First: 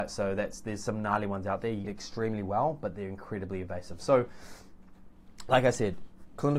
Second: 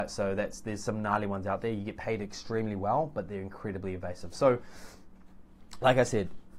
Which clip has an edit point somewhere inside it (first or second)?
first